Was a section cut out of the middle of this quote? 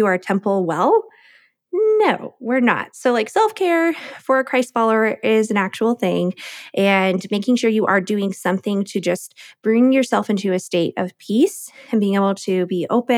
no; 0 cuts

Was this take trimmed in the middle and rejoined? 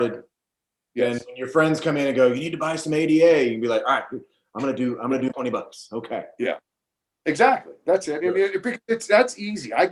yes; 1 cut; at 5.3 s

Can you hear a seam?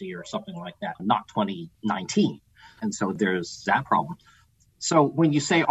no; 0 cuts

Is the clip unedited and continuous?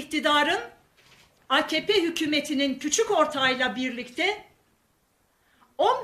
yes; 0 cuts

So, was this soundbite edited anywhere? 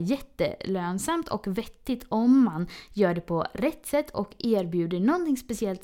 no; 0 cuts

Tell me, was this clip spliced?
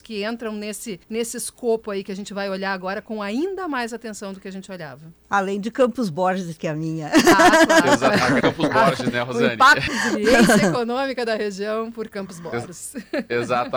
yes; 3 cuts; at 1.0 s, 8.4 s, 9.9 s

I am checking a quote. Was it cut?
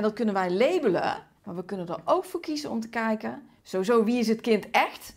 yes; 2 cuts; at 1.4 s, 3.6 s

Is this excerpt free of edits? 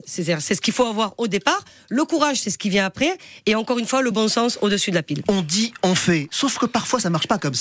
yes; 0 cuts

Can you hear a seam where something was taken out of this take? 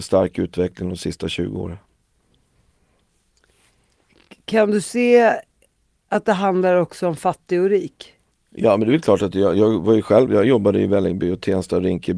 yes; 1 cut; at 8.3 s

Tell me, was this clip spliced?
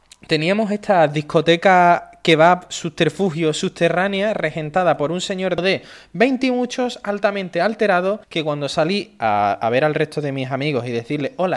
yes; 1 cut; at 8.2 s

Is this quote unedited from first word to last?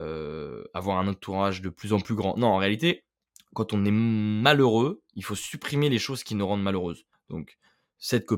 yes; 0 cuts

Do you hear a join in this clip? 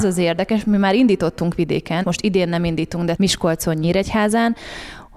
yes; 2 cuts; at 2.0 s, 3.2 s

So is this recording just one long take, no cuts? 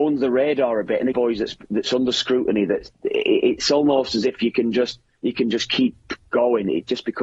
no; 1 cut; at 1.1 s

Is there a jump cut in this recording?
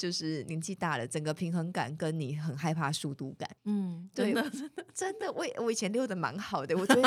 yes; 1 cut; at 3.6 s

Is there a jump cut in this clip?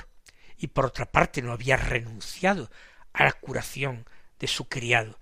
no; 0 cuts

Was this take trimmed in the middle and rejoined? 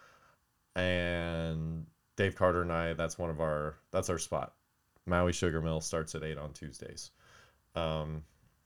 no; 0 cuts

